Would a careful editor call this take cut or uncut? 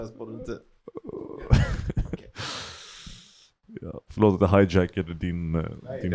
uncut